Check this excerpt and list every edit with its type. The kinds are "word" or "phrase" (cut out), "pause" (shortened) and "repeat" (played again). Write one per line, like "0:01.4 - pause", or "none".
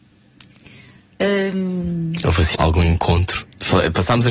0:02.5 - word